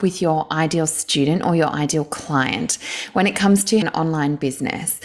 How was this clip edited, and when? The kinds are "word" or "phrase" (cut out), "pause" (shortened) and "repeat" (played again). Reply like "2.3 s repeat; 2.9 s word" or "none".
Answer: 3.8 s word